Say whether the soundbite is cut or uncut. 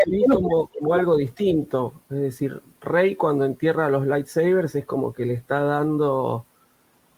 uncut